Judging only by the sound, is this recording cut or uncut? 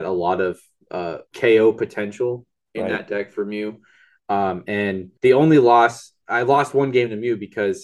cut